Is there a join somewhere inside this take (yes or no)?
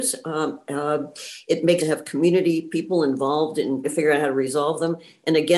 yes